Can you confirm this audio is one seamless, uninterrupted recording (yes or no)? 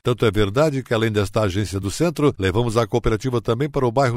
yes